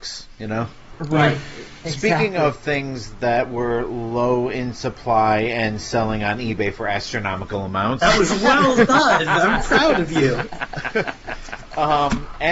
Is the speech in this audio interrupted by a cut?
no; 0 cuts

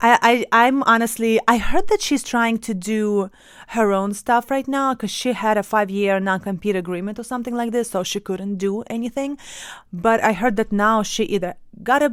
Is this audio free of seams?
yes; 0 cuts

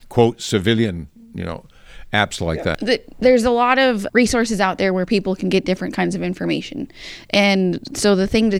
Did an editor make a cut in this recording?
yes; 1 cut; at 4.1 s

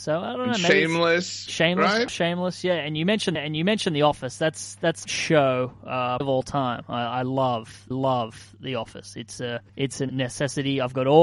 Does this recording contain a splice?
yes; 7 cuts; at 2.1 s, 3.4 s, 5.1 s, 6.2 s, 7.9 s, 9.7 s, 10.1 s

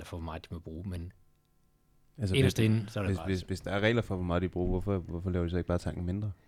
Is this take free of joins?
yes; 0 cuts

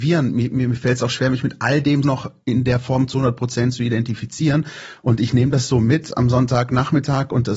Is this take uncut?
no; 1 cut; at 2.0 s

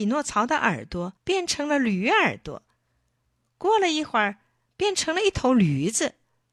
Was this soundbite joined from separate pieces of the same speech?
yes; 1 cut; at 1.2 s

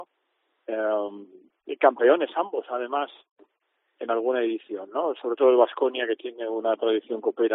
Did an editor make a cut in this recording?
no; 0 cuts

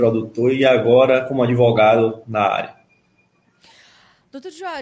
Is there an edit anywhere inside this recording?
no; 0 cuts

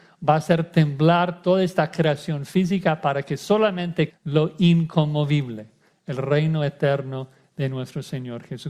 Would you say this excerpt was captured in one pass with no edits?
no; 1 cut; at 4.1 s

